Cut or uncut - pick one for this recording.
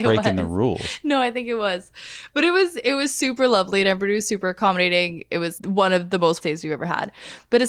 cut